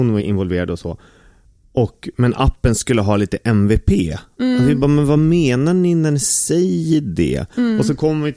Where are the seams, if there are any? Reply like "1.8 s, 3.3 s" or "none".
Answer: none